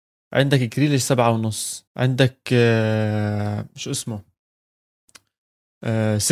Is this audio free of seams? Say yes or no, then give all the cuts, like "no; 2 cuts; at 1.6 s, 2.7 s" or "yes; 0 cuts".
no; 1 cut; at 1.9 s